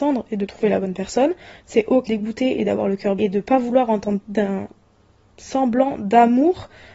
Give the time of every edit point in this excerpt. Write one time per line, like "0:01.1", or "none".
0:02.1
0:03.2
0:04.2